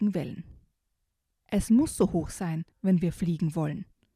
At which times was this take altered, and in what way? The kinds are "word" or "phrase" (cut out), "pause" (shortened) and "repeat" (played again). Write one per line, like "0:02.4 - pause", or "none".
0:02.7 - pause